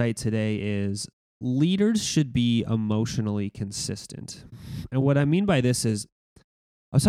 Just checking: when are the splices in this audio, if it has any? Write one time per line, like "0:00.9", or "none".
none